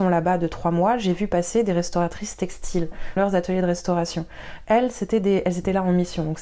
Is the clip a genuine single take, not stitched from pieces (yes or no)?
no